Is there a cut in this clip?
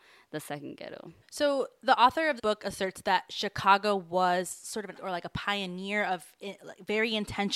yes; 3 cuts; at 1.2 s, 2.4 s, 4.9 s

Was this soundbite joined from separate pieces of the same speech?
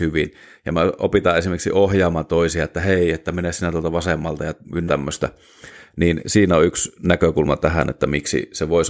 yes; 1 cut; at 4.9 s

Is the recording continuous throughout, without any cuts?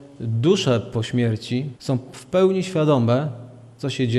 no; 1 cut; at 1.8 s

